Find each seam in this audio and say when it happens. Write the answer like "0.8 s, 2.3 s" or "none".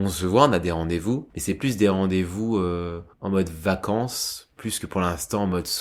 1.3 s, 3.1 s